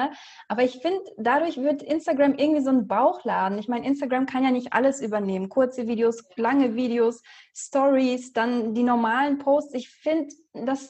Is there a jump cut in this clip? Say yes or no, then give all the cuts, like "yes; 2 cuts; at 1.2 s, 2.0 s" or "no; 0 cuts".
no; 0 cuts